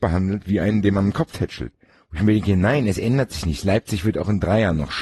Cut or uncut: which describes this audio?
uncut